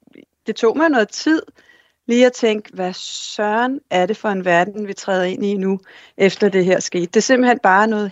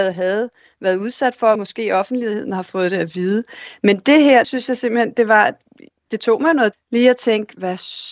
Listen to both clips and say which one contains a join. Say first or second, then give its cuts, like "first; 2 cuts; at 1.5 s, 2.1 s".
second; 3 cuts; at 1.6 s, 4.4 s, 6.7 s